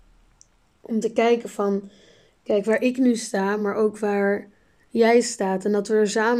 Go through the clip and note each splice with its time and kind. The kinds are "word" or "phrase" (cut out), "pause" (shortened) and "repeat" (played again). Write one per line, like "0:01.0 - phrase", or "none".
none